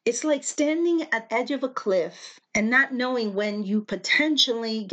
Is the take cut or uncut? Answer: cut